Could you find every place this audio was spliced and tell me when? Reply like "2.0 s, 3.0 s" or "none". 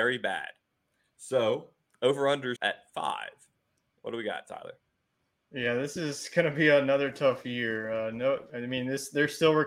2.6 s